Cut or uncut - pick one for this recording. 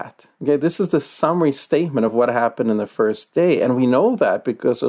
uncut